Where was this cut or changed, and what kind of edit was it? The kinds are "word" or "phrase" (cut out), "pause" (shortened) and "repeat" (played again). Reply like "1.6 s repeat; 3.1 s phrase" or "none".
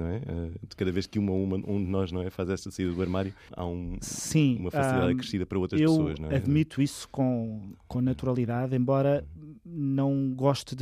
none